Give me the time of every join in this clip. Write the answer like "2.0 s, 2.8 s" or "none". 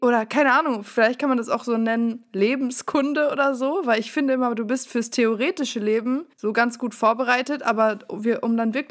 6.3 s